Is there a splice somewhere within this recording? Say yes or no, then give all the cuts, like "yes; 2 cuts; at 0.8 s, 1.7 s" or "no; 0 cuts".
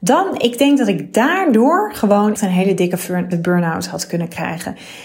yes; 2 cuts; at 2.4 s, 3.3 s